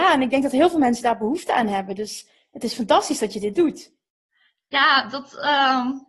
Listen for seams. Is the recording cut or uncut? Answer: uncut